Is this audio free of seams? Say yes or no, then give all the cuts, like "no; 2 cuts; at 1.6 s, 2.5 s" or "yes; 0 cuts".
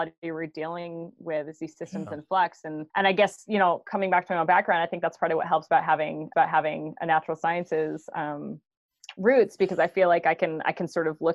no; 2 cuts; at 2.9 s, 6.3 s